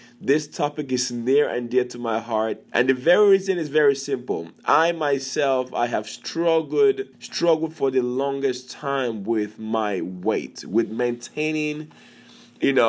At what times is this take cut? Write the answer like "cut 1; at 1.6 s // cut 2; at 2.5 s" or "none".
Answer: cut 1; at 2.7 s // cut 2; at 7.1 s